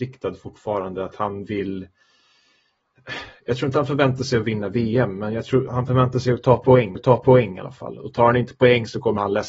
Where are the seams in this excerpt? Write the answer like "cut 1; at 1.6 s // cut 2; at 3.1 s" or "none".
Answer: cut 1; at 5.7 s // cut 2; at 6.9 s